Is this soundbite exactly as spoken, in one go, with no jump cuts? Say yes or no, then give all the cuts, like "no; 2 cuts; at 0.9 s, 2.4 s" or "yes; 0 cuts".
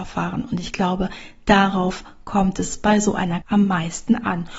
no; 1 cut; at 3.4 s